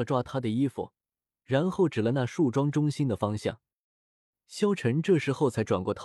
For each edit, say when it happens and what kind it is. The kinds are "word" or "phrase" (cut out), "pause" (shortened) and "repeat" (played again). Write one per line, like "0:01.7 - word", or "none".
none